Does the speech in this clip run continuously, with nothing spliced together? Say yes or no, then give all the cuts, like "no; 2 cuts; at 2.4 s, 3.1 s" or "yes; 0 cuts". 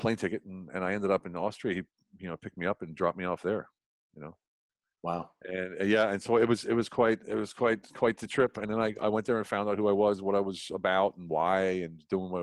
yes; 0 cuts